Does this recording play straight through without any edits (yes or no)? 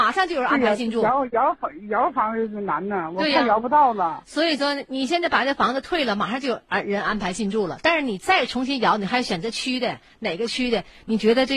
yes